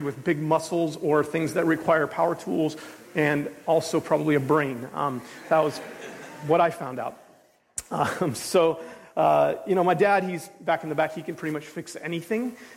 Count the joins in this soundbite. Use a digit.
0